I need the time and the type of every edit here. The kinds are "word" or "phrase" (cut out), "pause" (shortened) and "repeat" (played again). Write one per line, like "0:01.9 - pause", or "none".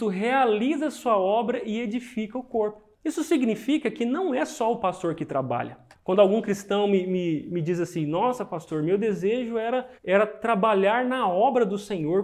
0:02.9 - pause
0:05.9 - pause
0:10.0 - pause